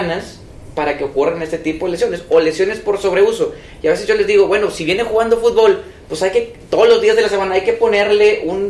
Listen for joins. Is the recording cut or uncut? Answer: uncut